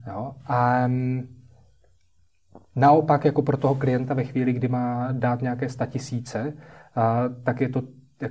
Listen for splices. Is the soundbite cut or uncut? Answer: uncut